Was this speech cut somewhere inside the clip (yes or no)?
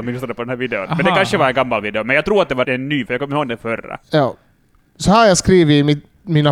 yes